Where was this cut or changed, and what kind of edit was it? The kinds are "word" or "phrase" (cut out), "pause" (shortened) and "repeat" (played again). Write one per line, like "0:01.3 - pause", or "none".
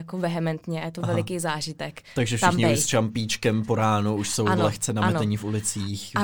none